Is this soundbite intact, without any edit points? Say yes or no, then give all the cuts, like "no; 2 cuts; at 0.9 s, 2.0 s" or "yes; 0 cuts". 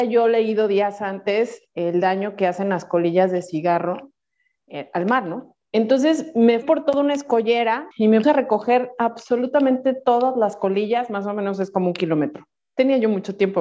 no; 5 cuts; at 4.7 s, 5.6 s, 6.6 s, 7.9 s, 8.2 s